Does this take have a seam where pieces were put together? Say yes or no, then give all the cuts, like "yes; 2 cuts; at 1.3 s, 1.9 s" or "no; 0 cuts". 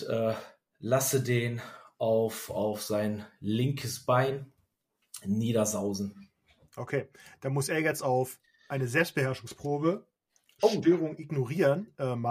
no; 0 cuts